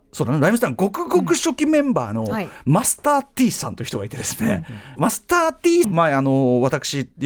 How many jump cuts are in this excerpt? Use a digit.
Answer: 2